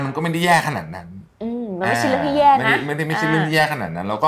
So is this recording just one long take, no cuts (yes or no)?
yes